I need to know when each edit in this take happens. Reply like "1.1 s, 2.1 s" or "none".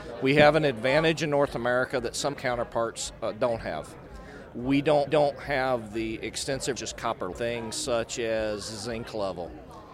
2.3 s, 5.1 s, 6.8 s, 7.3 s